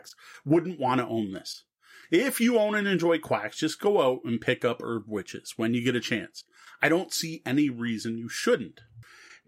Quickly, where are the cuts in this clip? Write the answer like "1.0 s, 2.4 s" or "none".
none